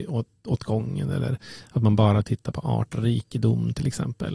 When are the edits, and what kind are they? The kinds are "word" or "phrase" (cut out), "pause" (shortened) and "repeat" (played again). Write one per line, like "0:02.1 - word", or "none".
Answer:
none